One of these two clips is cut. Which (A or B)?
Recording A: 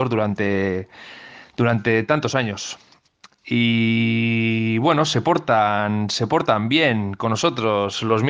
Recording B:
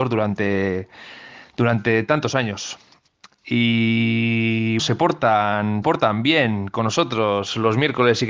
B